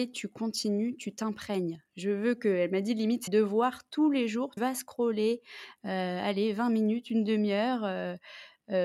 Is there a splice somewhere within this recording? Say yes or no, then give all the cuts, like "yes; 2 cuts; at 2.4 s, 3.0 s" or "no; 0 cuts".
yes; 2 cuts; at 3.3 s, 4.6 s